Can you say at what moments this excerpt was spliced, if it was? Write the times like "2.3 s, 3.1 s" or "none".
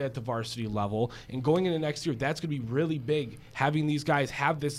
none